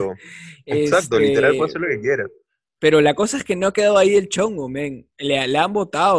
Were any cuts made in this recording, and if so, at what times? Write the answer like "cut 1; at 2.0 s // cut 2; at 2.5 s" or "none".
none